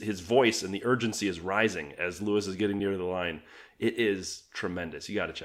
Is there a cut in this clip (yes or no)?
no